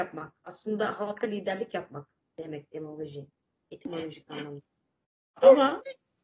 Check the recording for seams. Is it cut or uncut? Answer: uncut